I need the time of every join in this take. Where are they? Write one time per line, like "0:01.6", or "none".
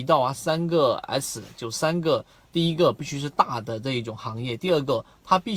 none